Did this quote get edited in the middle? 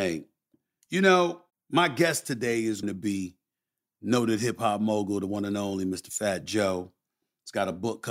yes; 2 cuts; at 1.5 s, 2.8 s

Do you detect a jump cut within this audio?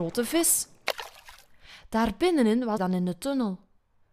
yes; 1 cut; at 2.8 s

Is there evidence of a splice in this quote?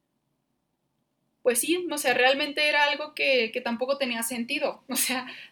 no; 0 cuts

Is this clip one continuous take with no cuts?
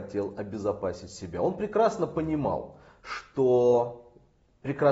yes; 0 cuts

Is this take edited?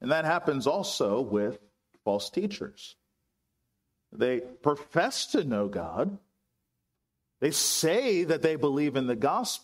no; 0 cuts

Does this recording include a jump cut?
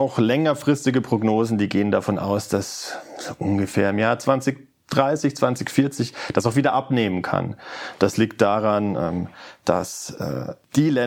no; 0 cuts

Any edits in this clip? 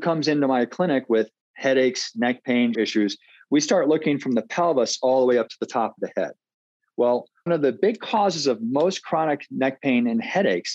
yes; 3 cuts; at 1.4 s, 2.7 s, 7.5 s

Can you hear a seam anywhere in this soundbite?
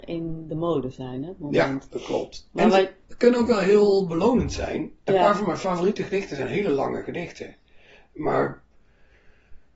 no; 0 cuts

